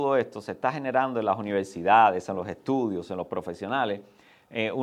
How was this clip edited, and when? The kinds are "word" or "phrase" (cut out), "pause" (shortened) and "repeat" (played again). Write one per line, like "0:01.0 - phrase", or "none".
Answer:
none